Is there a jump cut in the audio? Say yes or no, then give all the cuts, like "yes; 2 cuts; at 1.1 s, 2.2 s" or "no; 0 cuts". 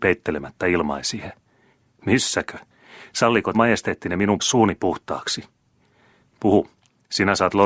yes; 2 cuts; at 3.5 s, 4.4 s